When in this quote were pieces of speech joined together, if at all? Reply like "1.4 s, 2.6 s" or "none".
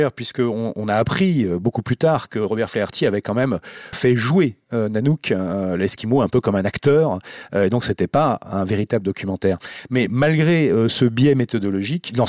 3.9 s